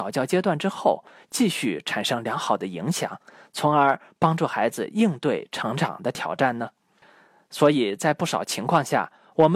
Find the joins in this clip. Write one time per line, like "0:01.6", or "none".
none